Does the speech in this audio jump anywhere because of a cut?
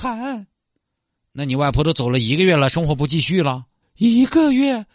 yes; 1 cut; at 3.8 s

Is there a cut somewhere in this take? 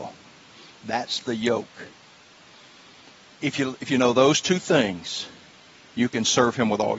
no; 0 cuts

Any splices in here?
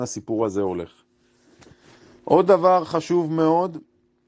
no; 0 cuts

